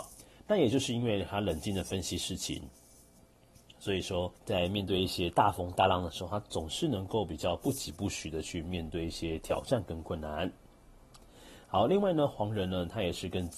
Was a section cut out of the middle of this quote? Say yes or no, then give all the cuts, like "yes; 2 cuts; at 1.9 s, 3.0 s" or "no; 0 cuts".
yes; 1 cut; at 4.4 s